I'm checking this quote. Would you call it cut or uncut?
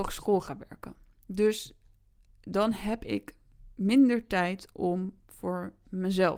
uncut